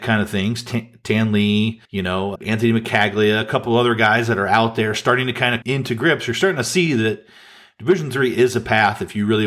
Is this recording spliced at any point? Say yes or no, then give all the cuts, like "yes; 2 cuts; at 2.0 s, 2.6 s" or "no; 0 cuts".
yes; 3 cuts; at 1.8 s, 2.4 s, 5.6 s